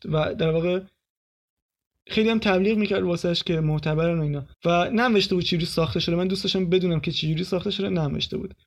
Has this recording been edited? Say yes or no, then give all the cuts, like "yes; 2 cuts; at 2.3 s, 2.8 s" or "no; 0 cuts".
yes; 1 cut; at 4.5 s